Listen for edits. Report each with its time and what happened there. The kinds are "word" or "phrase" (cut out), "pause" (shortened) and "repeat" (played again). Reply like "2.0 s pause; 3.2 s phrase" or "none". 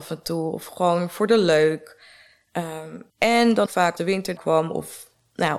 3.1 s pause; 3.7 s phrase; 4.0 s word; 4.4 s word